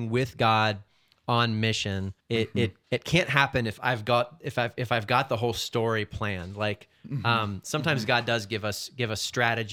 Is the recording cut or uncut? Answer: cut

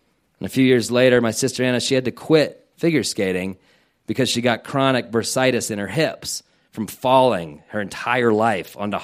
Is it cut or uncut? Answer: uncut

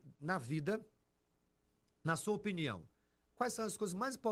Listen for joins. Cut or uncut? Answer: uncut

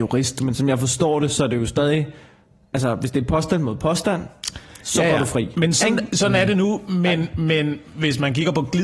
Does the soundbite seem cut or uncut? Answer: uncut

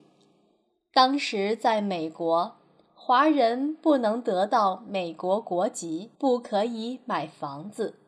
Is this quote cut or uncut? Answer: cut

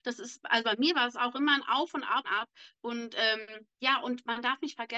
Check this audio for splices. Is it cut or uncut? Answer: cut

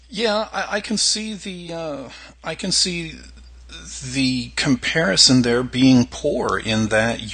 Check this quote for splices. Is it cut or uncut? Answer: uncut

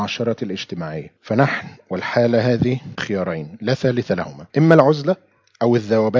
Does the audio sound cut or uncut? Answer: cut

